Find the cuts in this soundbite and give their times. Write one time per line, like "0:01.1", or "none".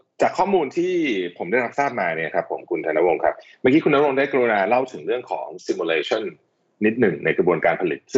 none